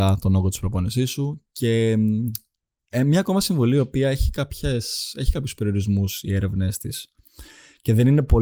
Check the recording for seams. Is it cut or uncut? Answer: uncut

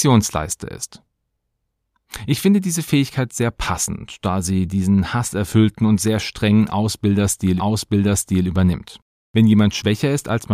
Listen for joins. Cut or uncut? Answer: cut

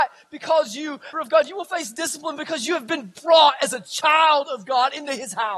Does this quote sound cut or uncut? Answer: cut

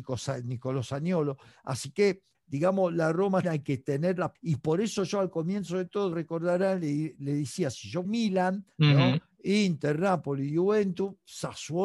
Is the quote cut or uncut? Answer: cut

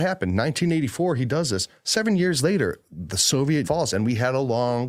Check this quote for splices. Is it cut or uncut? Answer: cut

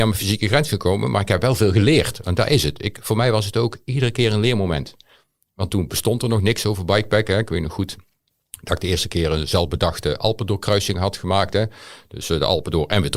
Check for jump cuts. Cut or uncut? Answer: uncut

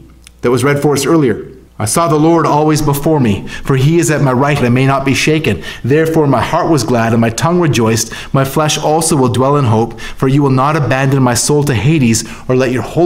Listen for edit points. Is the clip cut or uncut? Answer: cut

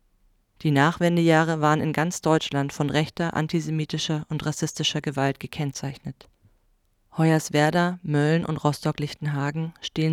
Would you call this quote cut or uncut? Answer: uncut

